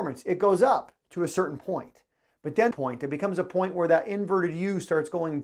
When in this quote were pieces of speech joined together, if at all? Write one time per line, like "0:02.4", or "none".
0:02.7

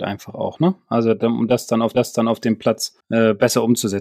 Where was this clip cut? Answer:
0:01.9
0:03.0

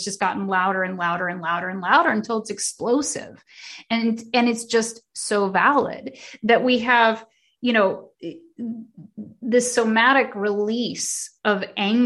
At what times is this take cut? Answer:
none

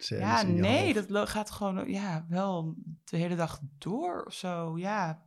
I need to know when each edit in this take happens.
none

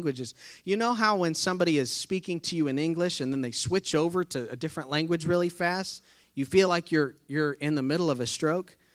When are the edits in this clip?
none

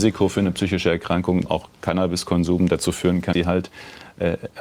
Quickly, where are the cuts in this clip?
0:01.5
0:03.3

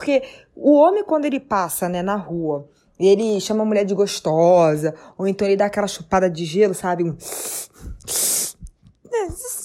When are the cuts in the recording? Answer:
none

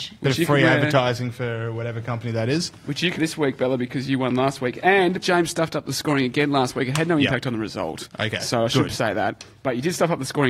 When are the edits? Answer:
0:03.2
0:05.2

